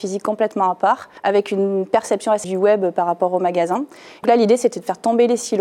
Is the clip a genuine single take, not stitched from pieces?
no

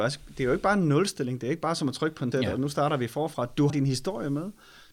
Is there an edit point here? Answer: yes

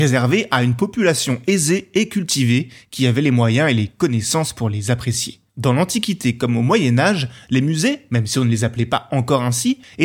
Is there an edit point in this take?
no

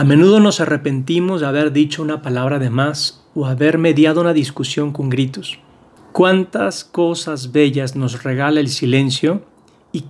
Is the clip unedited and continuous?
yes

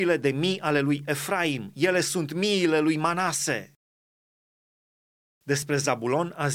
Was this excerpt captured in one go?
yes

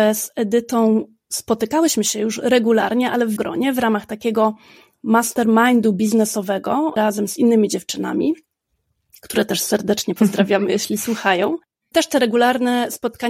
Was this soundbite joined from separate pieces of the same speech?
yes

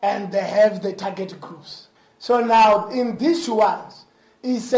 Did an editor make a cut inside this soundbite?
no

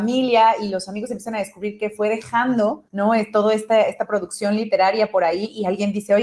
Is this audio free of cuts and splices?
no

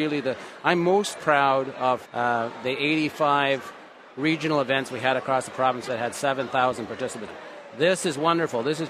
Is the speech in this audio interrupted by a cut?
yes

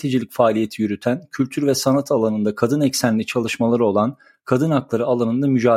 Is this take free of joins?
yes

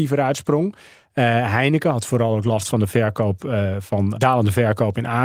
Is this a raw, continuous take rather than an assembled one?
no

